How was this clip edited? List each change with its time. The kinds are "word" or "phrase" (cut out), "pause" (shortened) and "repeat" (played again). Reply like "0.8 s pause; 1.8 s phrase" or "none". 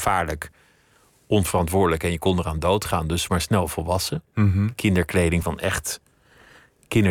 3.3 s word; 5.4 s word